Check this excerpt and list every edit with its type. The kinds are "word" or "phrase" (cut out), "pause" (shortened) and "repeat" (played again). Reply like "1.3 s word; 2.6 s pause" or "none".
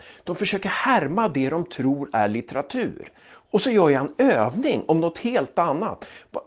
3.2 s pause